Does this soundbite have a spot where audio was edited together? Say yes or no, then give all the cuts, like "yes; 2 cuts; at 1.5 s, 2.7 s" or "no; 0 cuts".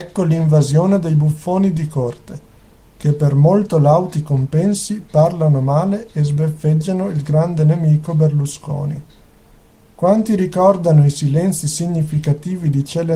no; 0 cuts